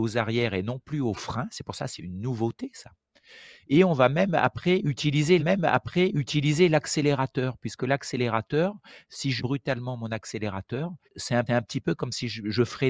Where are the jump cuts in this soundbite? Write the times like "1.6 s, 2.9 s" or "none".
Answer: 2.0 s, 5.4 s, 9.4 s, 11.0 s, 11.5 s